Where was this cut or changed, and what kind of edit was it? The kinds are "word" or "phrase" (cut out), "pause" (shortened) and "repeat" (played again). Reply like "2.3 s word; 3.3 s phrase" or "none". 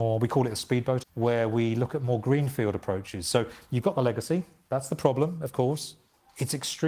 1.0 s word